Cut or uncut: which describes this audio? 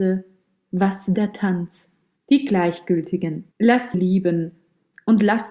cut